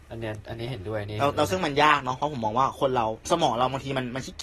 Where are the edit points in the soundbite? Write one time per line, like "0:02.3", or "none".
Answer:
0:03.2